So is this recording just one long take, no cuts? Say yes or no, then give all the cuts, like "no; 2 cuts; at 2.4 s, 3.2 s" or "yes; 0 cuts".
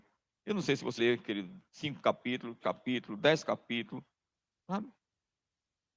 no; 2 cuts; at 1.0 s, 2.6 s